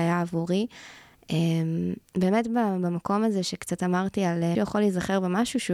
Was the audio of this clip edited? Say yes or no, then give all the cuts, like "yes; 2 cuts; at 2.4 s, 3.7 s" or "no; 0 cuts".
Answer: yes; 2 cuts; at 2.1 s, 4.5 s